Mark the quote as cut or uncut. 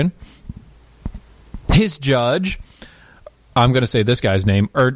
uncut